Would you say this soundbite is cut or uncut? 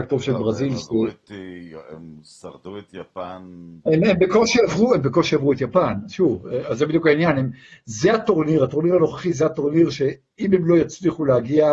uncut